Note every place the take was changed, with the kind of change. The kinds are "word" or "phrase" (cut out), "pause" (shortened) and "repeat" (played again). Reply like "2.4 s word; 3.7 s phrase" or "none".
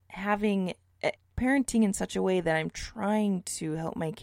1.2 s phrase